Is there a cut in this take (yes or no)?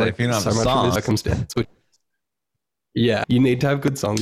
yes